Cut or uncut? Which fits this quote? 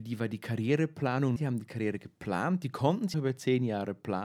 cut